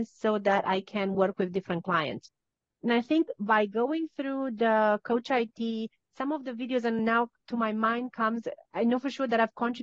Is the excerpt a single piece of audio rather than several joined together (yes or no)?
yes